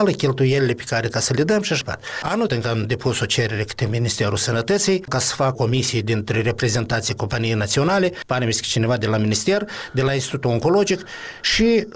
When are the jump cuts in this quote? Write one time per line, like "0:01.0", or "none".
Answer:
0:01.1
0:01.8
0:02.5
0:05.5